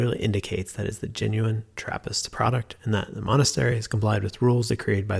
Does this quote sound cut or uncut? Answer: uncut